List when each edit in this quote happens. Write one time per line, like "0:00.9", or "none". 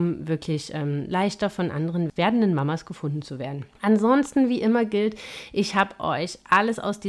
none